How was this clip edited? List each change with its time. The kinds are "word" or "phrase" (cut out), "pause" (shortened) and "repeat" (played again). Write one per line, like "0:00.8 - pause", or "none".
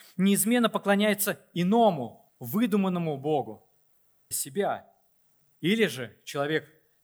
0:02.3 - pause
0:04.3 - phrase